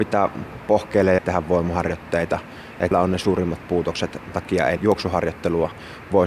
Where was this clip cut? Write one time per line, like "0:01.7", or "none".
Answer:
0:01.2
0:02.9
0:04.3
0:04.8